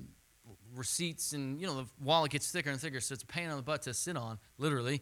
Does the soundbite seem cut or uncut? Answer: uncut